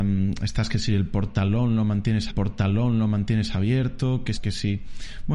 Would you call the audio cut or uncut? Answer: cut